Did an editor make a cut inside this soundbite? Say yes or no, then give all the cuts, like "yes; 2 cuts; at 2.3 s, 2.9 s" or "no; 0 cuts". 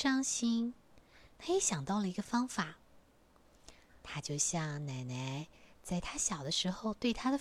no; 0 cuts